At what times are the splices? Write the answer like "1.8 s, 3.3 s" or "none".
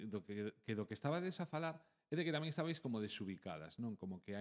none